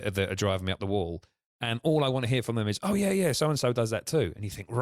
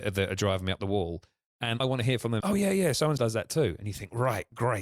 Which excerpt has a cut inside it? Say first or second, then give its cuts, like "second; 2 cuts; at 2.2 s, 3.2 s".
second; 3 cuts; at 1.8 s, 2.4 s, 3.2 s